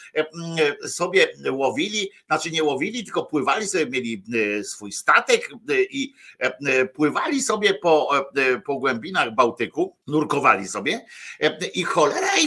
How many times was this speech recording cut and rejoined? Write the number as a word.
one